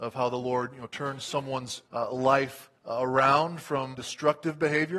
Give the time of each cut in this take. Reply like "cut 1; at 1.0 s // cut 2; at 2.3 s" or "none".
cut 1; at 1.8 s // cut 2; at 2.8 s // cut 3; at 3.9 s